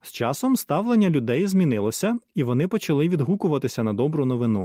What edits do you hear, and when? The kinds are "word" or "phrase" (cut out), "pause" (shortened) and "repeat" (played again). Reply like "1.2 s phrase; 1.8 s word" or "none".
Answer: none